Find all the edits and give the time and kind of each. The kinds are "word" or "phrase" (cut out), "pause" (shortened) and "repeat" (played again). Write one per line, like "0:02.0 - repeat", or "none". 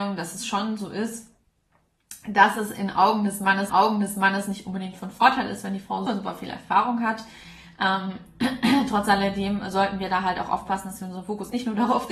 0:03.7 - repeat
0:06.1 - word